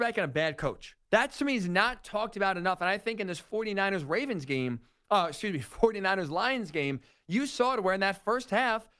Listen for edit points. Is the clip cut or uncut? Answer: cut